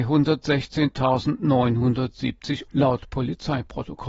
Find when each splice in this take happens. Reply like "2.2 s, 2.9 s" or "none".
2.7 s